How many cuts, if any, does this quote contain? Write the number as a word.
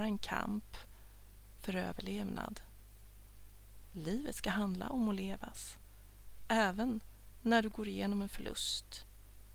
zero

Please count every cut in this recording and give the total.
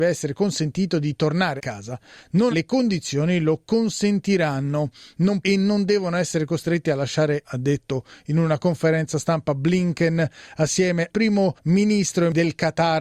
five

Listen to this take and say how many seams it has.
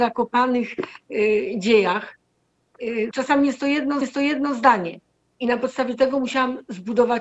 two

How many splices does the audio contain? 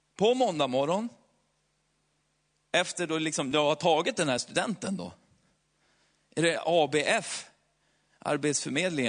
zero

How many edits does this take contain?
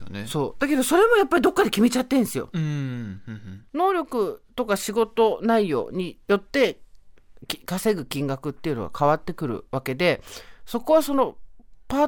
three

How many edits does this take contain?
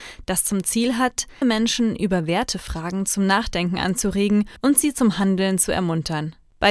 two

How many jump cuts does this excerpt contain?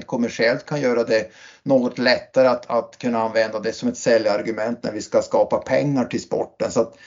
zero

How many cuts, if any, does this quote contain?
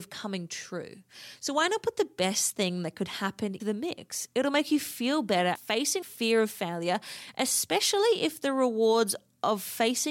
three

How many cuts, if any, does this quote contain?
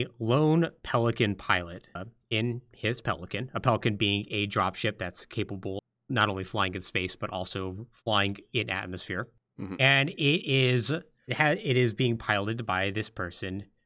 one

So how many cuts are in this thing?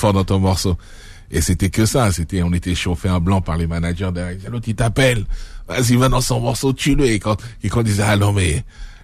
one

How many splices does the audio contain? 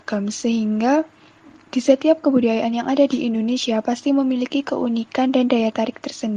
zero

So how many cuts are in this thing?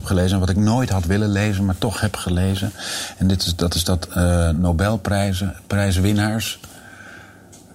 zero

